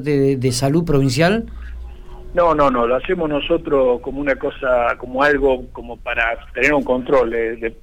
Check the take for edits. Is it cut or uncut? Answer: uncut